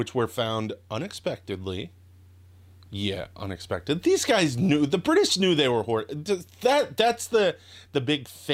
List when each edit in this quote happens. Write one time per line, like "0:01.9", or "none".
none

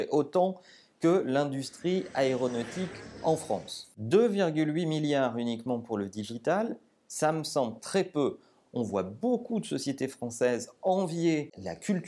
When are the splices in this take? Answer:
0:07.8

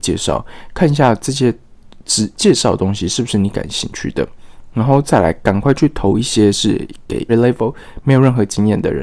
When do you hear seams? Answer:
0:07.3

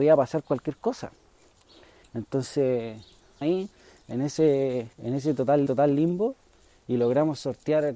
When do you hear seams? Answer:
0:03.4
0:04.9
0:05.7

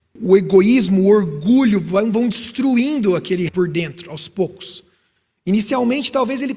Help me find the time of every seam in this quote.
0:03.5

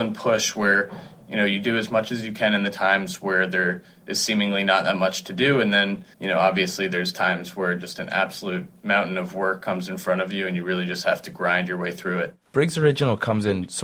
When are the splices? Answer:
0:06.1

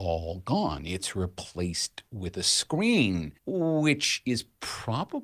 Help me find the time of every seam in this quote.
0:03.4

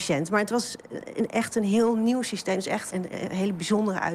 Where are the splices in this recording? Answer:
0:02.9

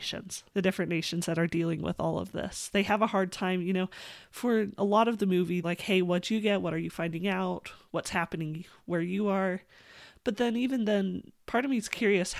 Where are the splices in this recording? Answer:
0:05.6

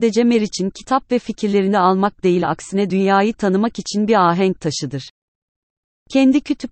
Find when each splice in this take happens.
none

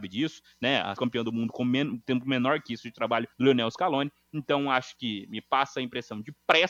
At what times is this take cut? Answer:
0:01.0
0:03.3

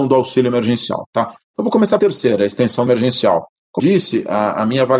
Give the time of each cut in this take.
0:02.0
0:02.9
0:03.8

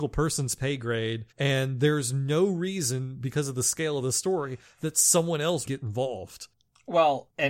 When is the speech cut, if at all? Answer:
0:01.3
0:05.7

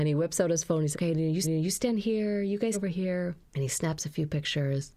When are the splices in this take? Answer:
0:00.9
0:01.4
0:02.7
0:03.4

